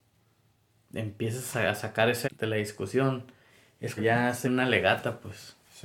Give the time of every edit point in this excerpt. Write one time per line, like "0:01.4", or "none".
0:02.2
0:04.0
0:04.4